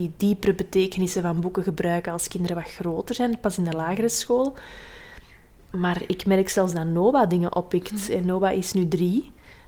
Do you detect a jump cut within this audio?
no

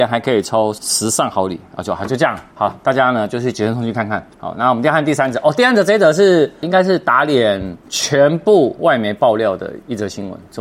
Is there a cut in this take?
yes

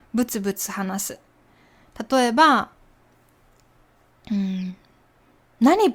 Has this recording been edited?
no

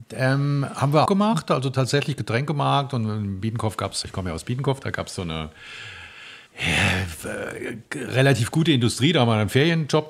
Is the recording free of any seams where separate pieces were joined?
no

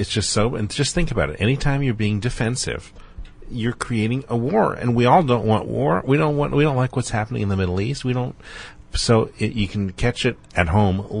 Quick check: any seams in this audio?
no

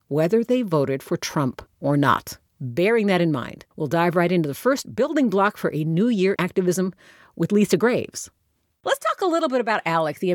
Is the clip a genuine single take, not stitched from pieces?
no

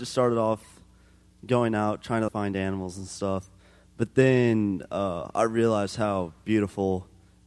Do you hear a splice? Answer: yes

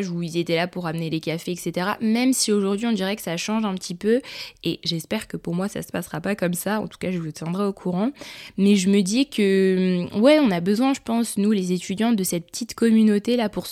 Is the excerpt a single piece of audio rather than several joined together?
yes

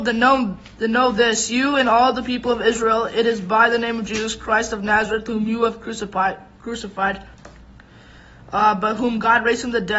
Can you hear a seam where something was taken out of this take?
no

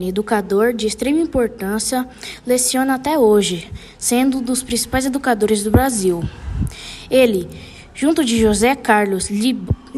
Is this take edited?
no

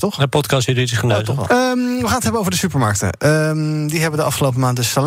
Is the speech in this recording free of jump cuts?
no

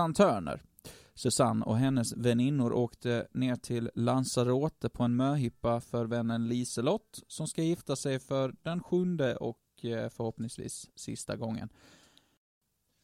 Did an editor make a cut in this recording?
no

